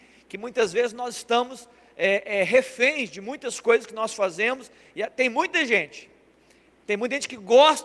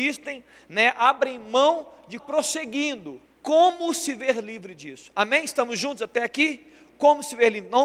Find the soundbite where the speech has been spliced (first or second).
second